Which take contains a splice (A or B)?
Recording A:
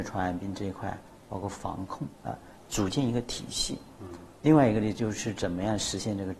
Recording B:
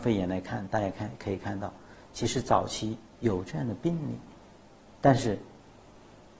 A